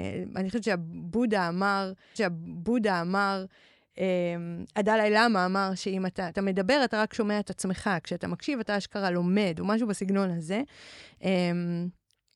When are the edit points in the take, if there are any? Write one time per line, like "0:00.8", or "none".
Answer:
0:02.2
0:06.3